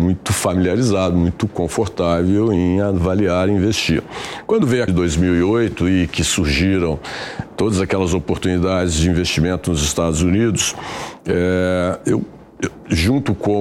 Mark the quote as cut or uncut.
cut